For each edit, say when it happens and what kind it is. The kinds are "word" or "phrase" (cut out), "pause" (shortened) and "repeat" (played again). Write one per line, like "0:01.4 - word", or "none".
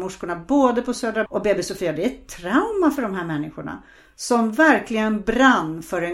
0:01.3 - word